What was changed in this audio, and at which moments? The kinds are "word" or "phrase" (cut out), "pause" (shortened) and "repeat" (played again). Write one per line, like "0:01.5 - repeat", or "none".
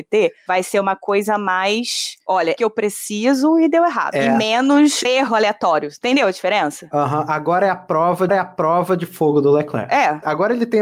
0:02.6 - phrase
0:05.0 - word
0:08.3 - repeat